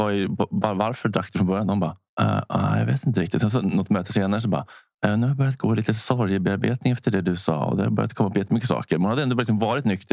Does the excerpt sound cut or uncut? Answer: uncut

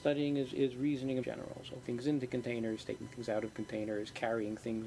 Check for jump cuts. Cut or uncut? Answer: cut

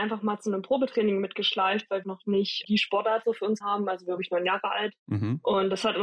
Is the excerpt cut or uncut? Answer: cut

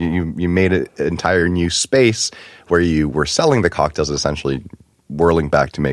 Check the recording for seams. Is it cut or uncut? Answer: uncut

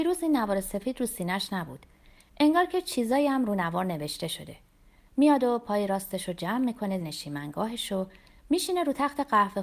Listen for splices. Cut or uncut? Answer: cut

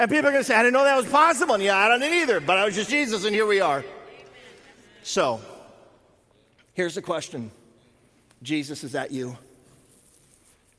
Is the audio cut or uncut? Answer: cut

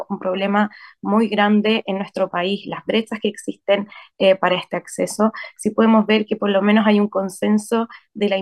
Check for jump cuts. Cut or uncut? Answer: uncut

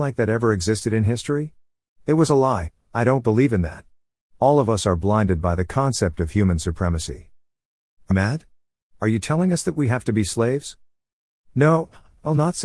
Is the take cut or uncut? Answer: cut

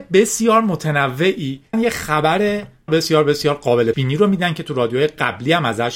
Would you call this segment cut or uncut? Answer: cut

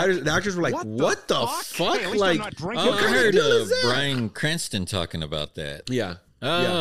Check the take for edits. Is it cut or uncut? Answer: uncut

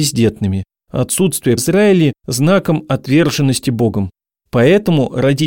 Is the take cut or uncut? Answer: cut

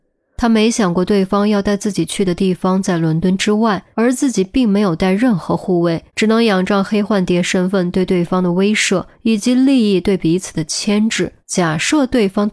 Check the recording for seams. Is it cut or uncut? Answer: cut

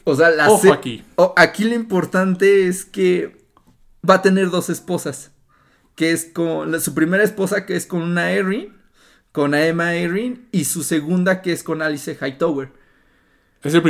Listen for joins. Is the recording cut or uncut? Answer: uncut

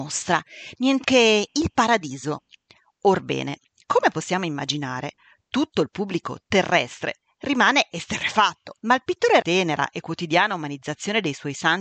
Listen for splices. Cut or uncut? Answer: cut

